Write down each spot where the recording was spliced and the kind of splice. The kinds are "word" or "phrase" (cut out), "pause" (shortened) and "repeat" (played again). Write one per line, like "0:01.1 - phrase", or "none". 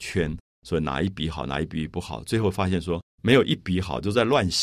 0:03.1 - pause